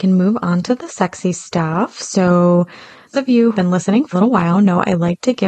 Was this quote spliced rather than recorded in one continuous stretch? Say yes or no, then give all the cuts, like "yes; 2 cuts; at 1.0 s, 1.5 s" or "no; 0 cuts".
yes; 4 cuts; at 3.1 s, 3.5 s, 4.1 s, 4.5 s